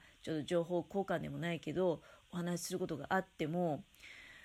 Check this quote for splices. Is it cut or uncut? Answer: uncut